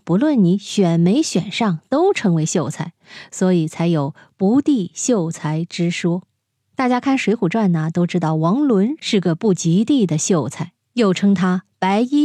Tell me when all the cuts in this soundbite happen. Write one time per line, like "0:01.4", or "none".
none